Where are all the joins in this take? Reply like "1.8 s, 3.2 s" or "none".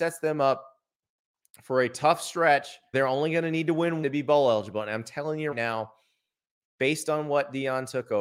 2.9 s, 4.0 s, 5.5 s